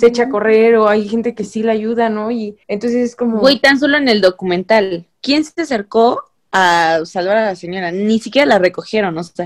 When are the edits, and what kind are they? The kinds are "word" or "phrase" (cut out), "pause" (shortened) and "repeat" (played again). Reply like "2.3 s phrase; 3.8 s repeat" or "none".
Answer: 2.6 s pause; 5.2 s pause